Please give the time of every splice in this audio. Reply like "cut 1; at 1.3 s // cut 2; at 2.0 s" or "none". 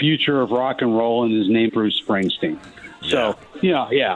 cut 1; at 1.7 s